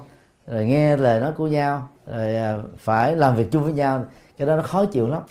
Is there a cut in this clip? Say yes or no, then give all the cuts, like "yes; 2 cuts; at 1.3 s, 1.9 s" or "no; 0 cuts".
yes; 1 cut; at 2.0 s